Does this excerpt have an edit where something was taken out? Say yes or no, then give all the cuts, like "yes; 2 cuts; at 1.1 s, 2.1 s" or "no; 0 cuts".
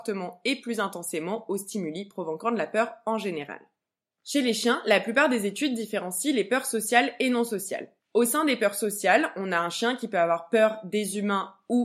yes; 1 cut; at 8.0 s